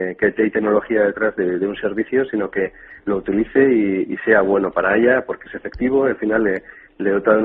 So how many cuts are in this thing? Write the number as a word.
zero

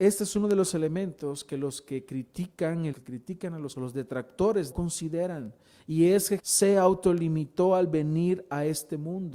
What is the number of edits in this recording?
four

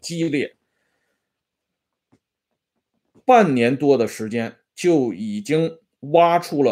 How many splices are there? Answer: one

